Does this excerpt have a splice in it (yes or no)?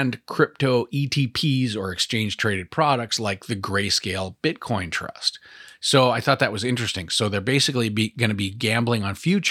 no